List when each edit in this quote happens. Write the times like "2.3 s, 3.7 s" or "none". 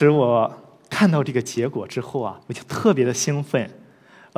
2.4 s